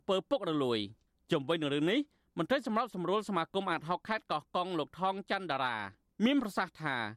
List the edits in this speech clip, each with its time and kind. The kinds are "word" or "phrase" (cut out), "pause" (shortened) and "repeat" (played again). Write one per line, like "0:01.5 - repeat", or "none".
none